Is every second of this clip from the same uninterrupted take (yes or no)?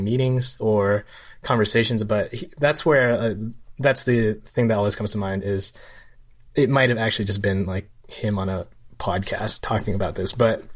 yes